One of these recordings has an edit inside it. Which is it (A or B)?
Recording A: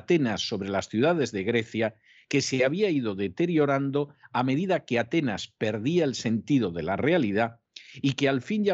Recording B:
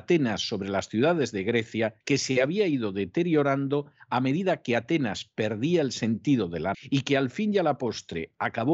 B